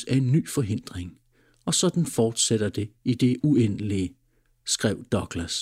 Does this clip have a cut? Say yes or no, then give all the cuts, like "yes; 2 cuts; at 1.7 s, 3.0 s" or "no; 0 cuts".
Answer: no; 0 cuts